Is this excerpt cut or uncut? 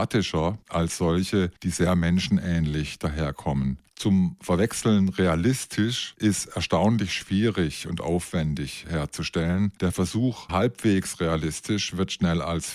cut